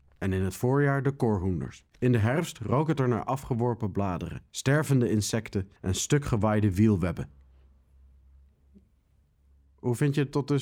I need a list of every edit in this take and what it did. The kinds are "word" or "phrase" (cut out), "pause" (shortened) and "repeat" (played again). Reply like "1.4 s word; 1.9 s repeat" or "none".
1.9 s pause; 4.5 s pause; 5.8 s pause